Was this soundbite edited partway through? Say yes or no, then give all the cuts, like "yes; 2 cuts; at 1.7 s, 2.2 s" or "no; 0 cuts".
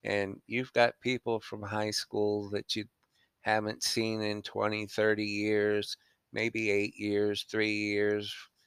no; 0 cuts